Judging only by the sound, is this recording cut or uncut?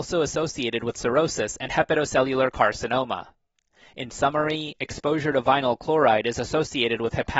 uncut